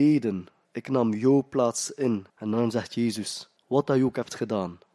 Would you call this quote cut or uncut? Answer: cut